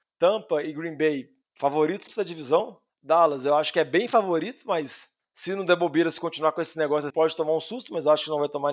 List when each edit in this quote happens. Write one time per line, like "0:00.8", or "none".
0:02.1
0:07.1